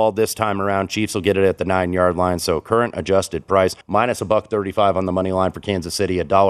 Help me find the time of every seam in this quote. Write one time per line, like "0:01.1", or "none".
0:03.8